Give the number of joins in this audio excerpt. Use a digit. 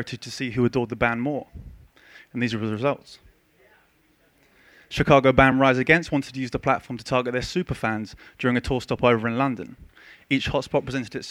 0